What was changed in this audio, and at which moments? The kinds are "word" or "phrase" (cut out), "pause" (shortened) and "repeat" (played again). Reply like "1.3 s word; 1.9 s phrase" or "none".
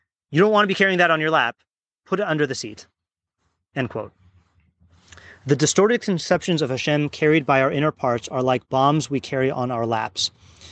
none